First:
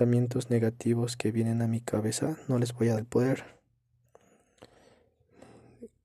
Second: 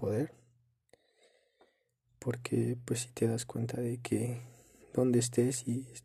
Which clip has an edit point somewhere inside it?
first; 1 cut; at 3.0 s

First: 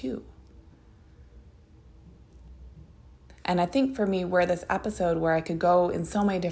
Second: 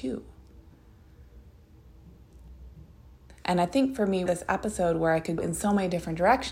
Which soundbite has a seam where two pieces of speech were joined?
second; 2 cuts; at 4.3 s, 5.4 s

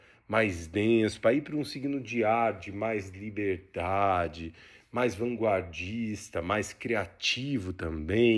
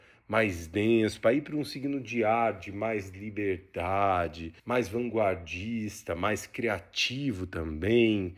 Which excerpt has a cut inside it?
second; 1 cut; at 4.6 s

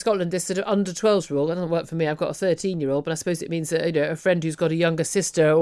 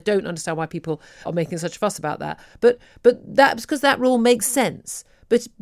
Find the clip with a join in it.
second; 1 cut; at 1.3 s

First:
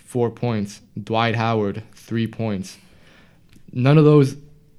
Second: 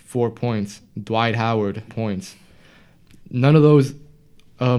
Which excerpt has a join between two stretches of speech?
second; 1 cut; at 1.9 s

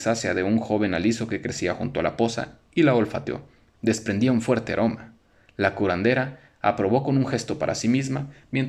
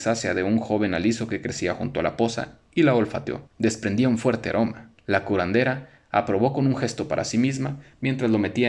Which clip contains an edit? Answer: second; 2 cuts; at 3.5 s, 5.0 s

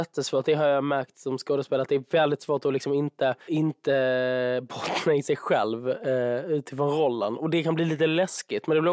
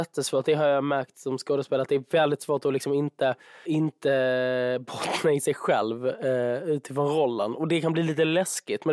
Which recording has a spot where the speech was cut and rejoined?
first; 1 cut; at 3.4 s

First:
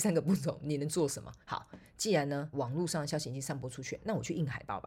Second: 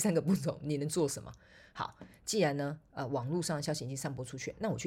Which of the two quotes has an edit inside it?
first; 2 cuts; at 1.4 s, 2.5 s

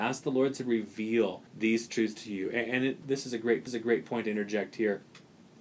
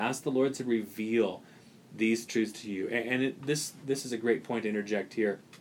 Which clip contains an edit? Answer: first; 3 cuts; at 1.5 s, 3.0 s, 3.7 s

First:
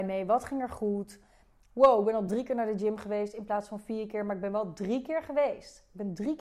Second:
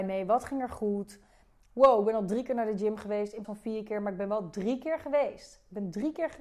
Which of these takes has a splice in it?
second; 1 cut; at 3.4 s

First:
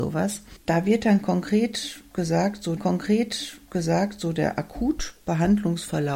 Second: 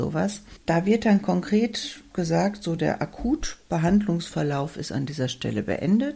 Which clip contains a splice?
first; 1 cut; at 2.8 s

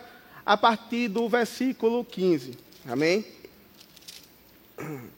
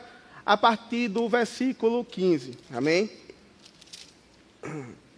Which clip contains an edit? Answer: second; 1 cut; at 2.6 s

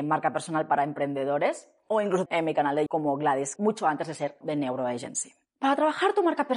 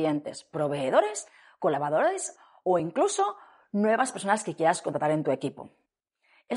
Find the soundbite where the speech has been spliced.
first; 4 cuts; at 2.3 s, 2.9 s, 3.6 s, 4.4 s

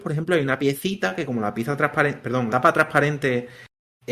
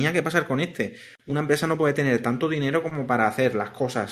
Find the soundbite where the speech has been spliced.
first; 1 cut; at 2.5 s

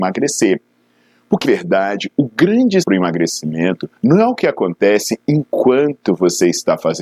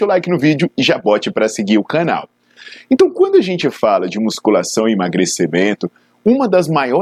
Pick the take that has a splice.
first; 3 cuts; at 1.4 s, 2.8 s, 4.0 s

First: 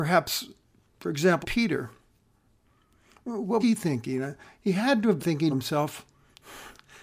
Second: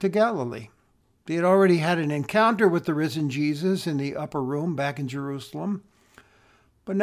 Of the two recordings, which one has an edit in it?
first; 4 cuts; at 1.4 s, 3.6 s, 5.2 s, 5.5 s

